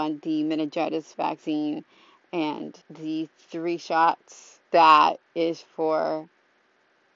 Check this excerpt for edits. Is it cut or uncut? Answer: cut